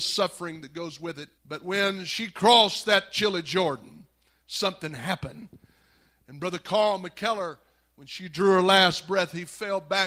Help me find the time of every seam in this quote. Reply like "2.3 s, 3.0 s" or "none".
1.4 s